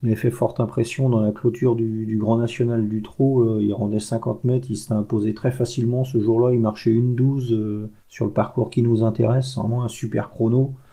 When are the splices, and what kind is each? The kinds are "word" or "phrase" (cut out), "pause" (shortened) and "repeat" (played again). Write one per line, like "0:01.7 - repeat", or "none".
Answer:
0:08.0 - pause